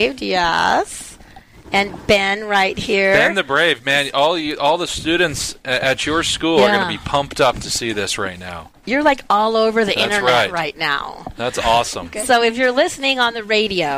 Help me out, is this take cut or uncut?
uncut